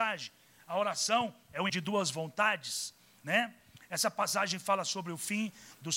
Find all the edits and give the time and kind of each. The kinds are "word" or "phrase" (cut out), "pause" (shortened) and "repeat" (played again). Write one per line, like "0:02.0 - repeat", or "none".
0:01.7 - word